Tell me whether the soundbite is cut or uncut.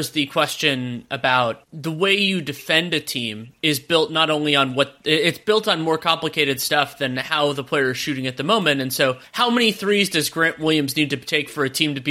uncut